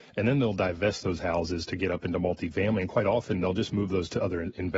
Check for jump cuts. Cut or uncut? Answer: uncut